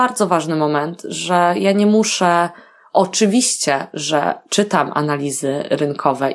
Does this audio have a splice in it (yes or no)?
no